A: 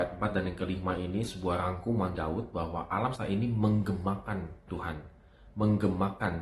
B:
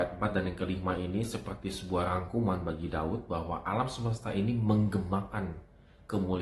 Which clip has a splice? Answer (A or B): A